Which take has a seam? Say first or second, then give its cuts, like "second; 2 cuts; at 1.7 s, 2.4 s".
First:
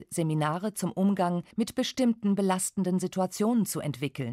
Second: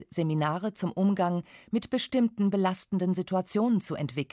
first; 1 cut; at 1.5 s